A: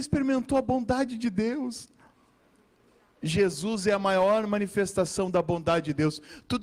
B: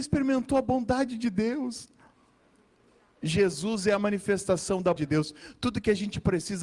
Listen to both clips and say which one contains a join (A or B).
B